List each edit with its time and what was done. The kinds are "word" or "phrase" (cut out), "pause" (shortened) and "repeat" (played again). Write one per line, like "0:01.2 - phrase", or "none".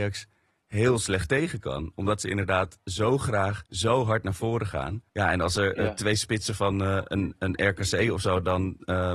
0:03.7 - pause
0:05.1 - pause